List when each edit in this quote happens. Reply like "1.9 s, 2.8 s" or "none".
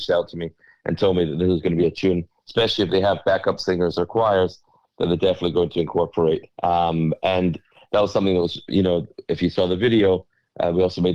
6.5 s